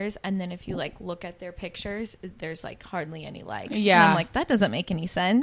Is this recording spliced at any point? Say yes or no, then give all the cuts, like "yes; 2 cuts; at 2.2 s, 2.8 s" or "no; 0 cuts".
no; 0 cuts